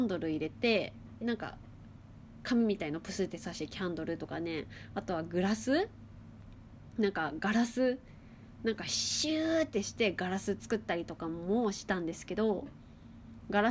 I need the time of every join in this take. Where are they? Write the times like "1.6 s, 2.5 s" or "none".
1.2 s